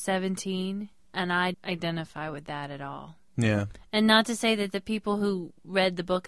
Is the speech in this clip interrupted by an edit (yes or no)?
yes